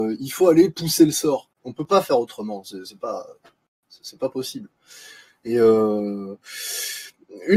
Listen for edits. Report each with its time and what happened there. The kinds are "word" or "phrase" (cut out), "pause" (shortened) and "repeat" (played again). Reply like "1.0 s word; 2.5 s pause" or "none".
1.5 s pause